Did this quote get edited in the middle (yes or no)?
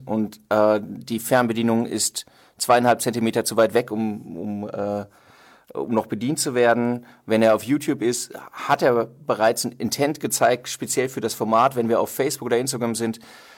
no